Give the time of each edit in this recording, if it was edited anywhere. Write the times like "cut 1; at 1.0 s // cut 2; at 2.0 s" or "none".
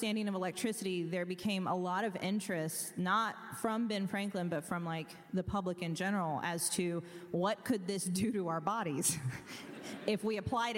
none

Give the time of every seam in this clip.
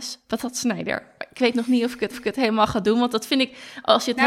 cut 1; at 2.1 s

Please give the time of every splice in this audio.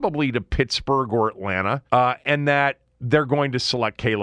cut 1; at 1.9 s

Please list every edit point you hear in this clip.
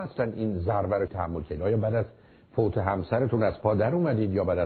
cut 1; at 1.1 s

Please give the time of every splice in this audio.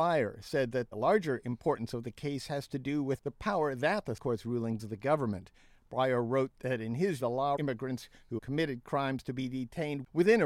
cut 1; at 0.9 s // cut 2; at 4.2 s // cut 3; at 4.8 s // cut 4; at 7.2 s // cut 5; at 7.6 s // cut 6; at 8.4 s

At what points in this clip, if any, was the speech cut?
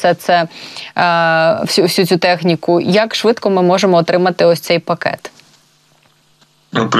none

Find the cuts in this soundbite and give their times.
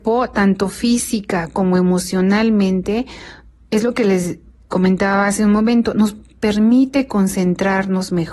none

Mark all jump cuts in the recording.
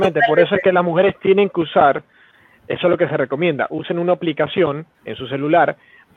cut 1; at 4.9 s

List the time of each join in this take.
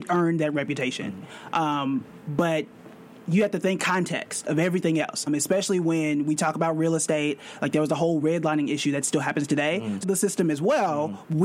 cut 1; at 3.8 s // cut 2; at 5.3 s // cut 3; at 10.0 s

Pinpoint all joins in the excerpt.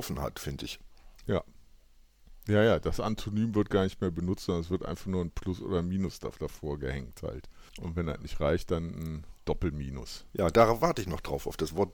cut 1; at 1.2 s // cut 2; at 6.3 s // cut 3; at 7.7 s // cut 4; at 10.3 s

